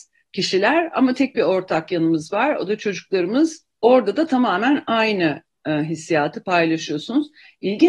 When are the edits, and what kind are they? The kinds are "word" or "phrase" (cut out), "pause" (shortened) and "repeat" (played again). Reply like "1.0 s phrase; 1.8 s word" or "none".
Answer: none

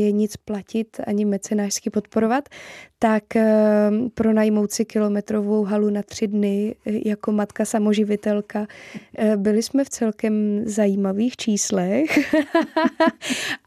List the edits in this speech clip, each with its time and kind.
none

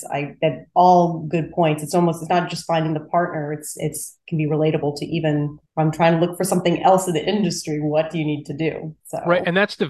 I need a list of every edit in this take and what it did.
5.7 s pause; 9.0 s pause

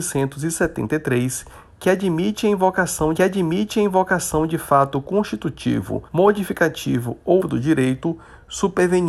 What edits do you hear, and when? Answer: 3.2 s repeat; 6.1 s pause; 7.4 s word

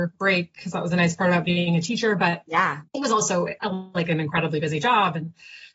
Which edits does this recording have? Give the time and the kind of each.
2.9 s pause

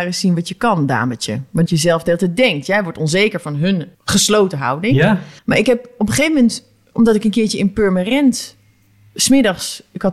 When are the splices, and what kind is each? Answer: 1.7 s phrase; 3.9 s pause; 5.4 s pause

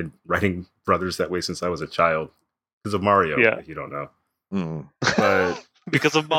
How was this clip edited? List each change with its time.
none

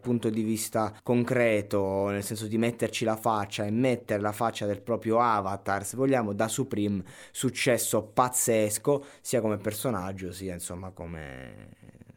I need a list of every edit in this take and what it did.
1.0 s pause

